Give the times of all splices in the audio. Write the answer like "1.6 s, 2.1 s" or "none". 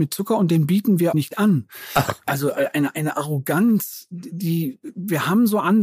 1.1 s